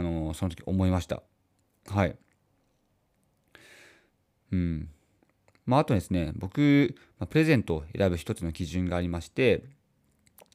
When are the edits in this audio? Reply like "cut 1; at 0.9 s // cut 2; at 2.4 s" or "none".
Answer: none